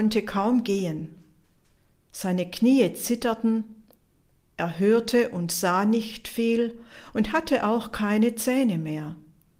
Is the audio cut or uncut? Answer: uncut